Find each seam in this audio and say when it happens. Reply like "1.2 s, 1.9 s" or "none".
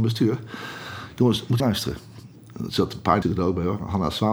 1.6 s, 3.2 s